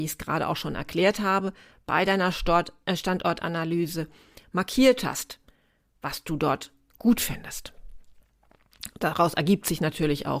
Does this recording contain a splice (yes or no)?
no